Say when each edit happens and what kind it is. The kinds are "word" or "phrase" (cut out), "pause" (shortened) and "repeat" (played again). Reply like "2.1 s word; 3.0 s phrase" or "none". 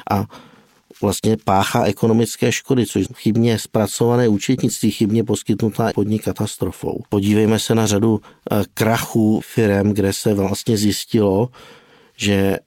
3.1 s phrase; 5.9 s phrase; 7.1 s pause; 9.4 s word

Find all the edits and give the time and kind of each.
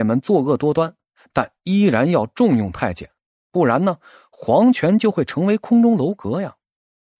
none

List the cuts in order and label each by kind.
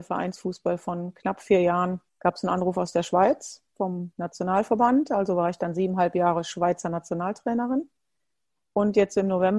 2.1 s pause

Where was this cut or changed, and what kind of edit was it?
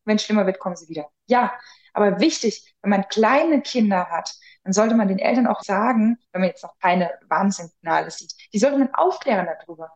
5.6 s word

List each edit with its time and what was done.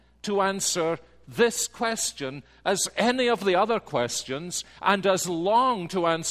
none

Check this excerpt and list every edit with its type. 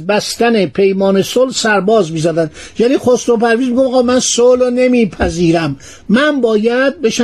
none

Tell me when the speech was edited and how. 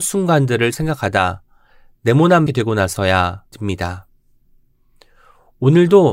2.5 s phrase; 3.5 s word

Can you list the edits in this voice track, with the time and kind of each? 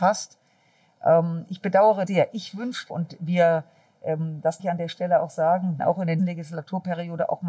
2.1 s word; 2.9 s word; 4.6 s word; 5.8 s word; 6.2 s word

